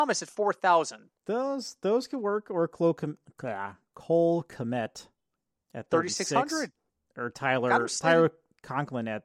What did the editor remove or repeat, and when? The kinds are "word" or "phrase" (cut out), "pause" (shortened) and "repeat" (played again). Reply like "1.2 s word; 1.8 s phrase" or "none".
1.2 s pause; 6.9 s pause